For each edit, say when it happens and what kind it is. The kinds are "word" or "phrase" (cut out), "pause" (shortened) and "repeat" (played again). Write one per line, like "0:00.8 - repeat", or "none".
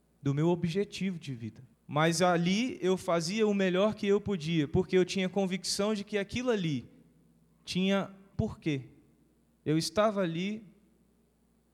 0:01.7 - pause
0:08.3 - word